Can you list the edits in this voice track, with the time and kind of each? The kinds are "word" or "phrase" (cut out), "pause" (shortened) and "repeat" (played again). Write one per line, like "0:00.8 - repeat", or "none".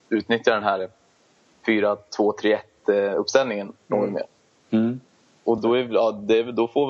0:05.6 - word